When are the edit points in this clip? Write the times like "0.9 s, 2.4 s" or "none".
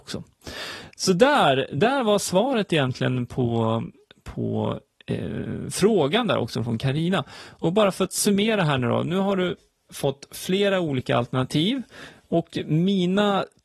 none